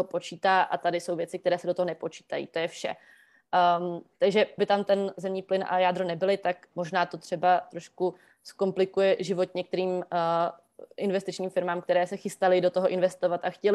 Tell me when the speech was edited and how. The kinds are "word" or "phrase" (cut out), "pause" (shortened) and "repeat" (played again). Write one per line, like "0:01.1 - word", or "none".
0:04.6 - word
0:06.7 - word